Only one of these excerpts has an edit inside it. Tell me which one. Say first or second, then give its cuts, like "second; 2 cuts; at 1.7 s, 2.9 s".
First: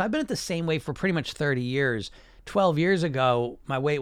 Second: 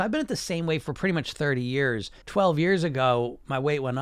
second; 1 cut; at 2.2 s